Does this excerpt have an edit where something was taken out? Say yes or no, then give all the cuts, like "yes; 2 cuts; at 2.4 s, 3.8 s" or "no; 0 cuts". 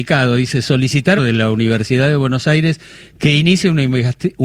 yes; 1 cut; at 1.2 s